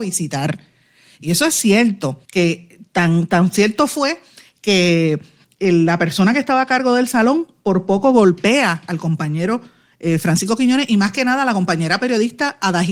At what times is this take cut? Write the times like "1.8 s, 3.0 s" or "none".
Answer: 2.2 s